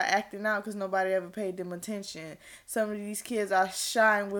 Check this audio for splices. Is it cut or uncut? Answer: uncut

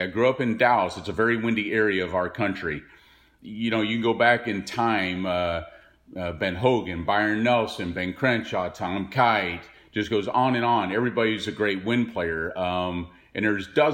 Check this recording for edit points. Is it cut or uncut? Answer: uncut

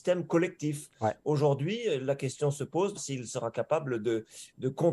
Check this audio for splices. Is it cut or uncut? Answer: cut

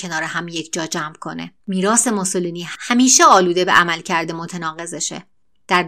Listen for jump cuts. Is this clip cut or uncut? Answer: cut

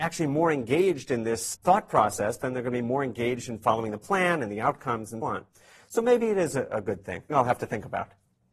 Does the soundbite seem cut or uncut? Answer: cut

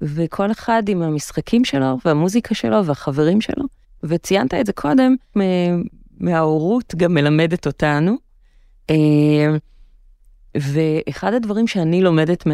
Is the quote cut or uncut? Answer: cut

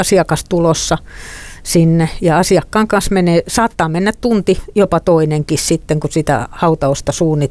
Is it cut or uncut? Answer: uncut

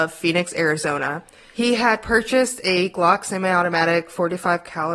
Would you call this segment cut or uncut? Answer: uncut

